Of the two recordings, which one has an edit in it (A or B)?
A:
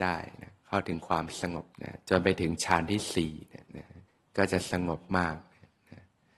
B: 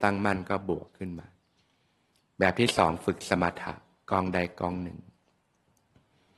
A